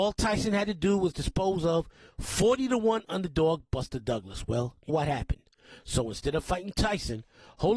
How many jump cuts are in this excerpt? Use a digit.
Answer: 1